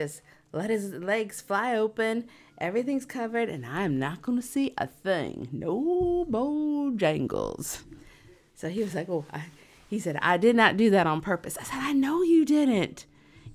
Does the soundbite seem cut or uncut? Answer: uncut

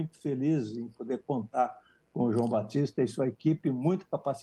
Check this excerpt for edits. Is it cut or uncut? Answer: uncut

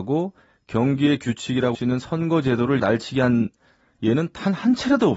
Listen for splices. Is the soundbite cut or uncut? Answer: cut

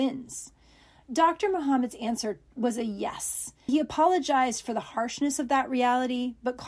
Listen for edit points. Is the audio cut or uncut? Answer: cut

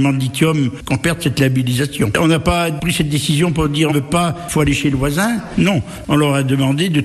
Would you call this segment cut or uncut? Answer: cut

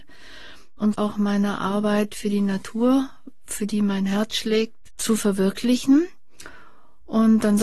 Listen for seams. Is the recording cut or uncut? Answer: cut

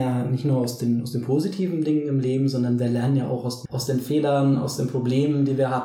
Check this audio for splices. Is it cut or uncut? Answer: cut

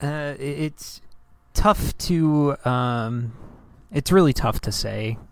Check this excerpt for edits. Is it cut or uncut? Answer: uncut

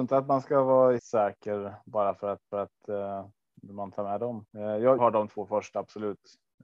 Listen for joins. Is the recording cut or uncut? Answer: cut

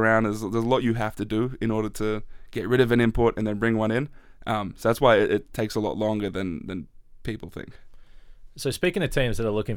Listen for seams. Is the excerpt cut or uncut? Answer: uncut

